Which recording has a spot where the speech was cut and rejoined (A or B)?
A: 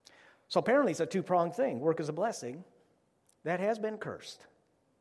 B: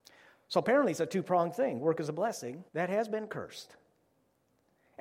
B